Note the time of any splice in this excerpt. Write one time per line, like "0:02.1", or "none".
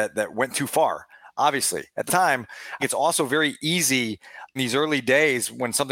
0:02.1
0:02.8
0:04.6